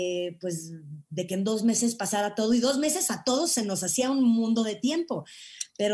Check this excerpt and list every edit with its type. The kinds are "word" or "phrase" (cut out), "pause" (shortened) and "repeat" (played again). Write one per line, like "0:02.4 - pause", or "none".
none